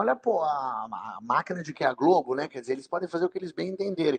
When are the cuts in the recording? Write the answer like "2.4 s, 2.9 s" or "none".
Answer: 1.7 s